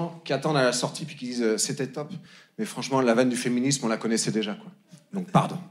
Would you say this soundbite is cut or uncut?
uncut